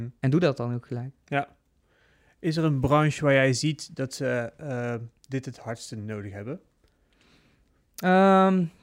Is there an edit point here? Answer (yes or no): no